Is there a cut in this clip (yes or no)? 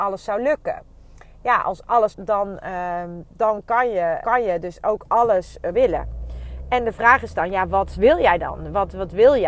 yes